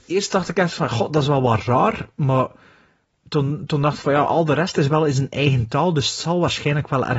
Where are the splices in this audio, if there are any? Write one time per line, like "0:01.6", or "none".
none